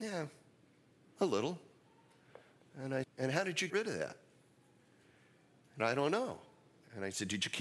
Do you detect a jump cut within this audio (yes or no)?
yes